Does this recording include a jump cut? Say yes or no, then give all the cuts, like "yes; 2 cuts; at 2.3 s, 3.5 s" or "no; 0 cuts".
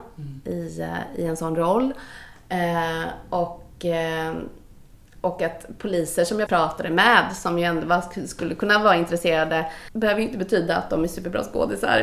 yes; 1 cut; at 6.5 s